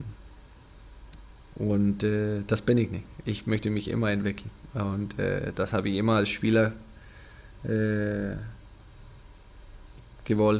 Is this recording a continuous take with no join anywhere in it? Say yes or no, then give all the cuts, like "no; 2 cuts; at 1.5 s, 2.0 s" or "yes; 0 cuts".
yes; 0 cuts